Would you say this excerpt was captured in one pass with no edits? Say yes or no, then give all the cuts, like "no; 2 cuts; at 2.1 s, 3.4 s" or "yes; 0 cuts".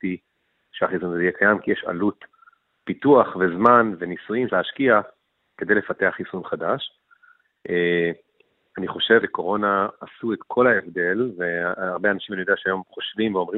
no; 2 cuts; at 4.5 s, 9.2 s